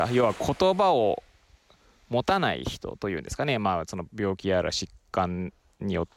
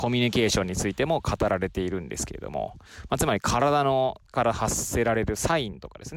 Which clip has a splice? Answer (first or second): second